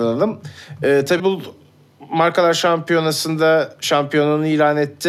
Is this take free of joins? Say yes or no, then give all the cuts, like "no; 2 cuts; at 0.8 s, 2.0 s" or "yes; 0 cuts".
no; 1 cut; at 1.2 s